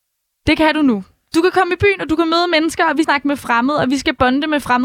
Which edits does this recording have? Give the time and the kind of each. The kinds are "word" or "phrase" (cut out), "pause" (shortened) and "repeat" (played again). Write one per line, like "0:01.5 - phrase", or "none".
0:03.0 - word